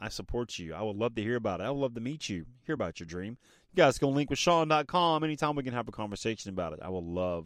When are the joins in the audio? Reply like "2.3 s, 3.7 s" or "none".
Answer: none